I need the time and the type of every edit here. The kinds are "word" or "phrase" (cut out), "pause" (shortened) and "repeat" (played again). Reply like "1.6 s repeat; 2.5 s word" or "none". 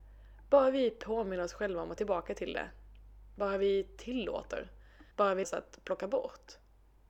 2.0 s word; 5.1 s pause; 5.4 s word